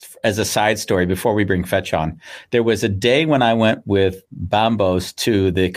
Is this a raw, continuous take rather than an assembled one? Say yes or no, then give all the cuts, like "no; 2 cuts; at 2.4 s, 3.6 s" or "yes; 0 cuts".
no; 1 cut; at 4.2 s